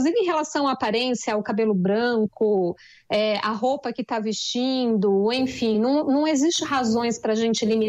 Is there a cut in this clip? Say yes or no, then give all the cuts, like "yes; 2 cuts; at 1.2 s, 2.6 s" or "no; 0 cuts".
no; 0 cuts